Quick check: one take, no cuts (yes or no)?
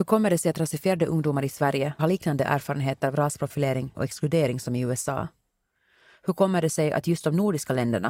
no